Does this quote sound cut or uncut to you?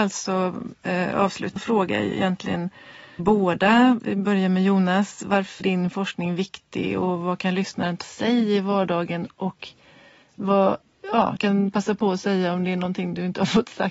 cut